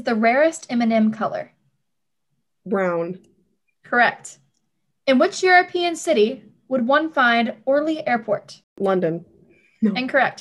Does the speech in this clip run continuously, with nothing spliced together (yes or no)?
yes